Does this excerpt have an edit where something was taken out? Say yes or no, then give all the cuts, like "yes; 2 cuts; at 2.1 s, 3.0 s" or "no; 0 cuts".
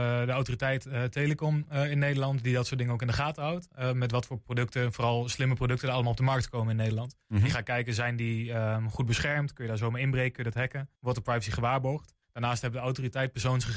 yes; 2 cuts; at 11.0 s, 12.2 s